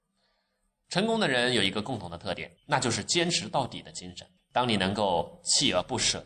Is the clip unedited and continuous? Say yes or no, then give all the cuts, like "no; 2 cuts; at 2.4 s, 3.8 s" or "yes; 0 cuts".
no; 2 cuts; at 2.6 s, 4.4 s